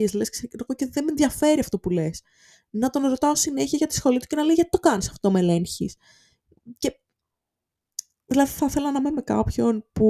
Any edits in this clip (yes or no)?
no